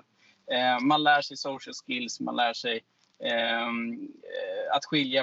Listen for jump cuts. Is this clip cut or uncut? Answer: uncut